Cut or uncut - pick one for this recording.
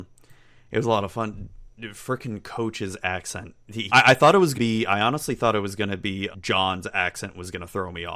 cut